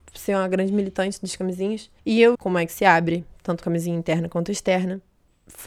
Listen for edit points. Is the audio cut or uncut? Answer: cut